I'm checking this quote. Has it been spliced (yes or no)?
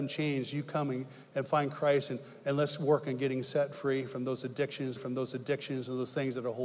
yes